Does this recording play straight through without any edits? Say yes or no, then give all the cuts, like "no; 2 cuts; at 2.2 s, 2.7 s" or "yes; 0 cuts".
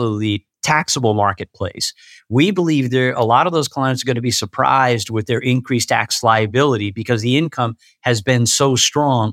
yes; 0 cuts